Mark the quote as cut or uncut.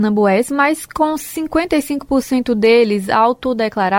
uncut